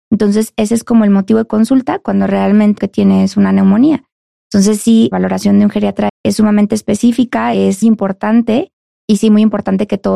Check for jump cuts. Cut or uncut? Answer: cut